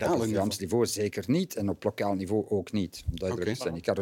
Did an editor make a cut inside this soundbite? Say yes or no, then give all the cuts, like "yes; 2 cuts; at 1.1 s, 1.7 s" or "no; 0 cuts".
no; 0 cuts